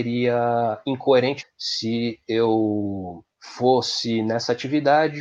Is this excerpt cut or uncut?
cut